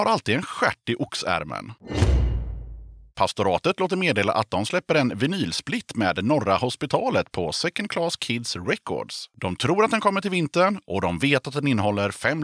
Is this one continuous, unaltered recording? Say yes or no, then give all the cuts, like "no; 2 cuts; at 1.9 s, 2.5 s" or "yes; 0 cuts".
yes; 0 cuts